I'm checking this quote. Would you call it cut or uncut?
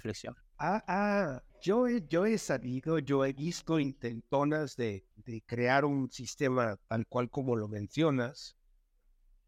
cut